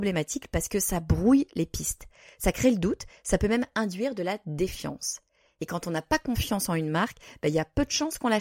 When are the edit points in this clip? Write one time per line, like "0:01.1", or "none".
none